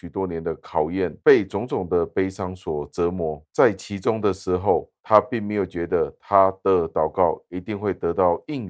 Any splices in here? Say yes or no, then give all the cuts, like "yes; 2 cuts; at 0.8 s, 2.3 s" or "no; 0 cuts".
yes; 2 cuts; at 1.2 s, 5.0 s